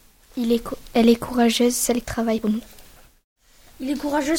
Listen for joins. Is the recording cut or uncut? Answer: cut